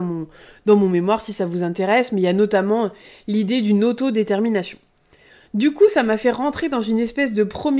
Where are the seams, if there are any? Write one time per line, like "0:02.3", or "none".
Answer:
none